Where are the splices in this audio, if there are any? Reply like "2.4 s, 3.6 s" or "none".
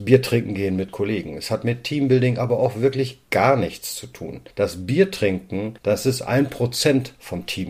4.5 s, 5.8 s